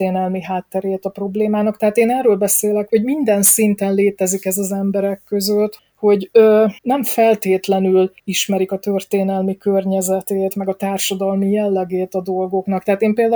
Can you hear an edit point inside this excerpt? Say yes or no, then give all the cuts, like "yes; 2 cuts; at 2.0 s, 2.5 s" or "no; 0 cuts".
yes; 4 cuts; at 2.9 s, 5.8 s, 6.8 s, 8.2 s